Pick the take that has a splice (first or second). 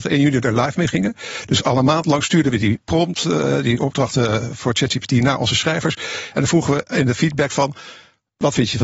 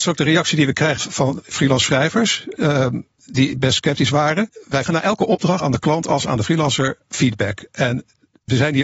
second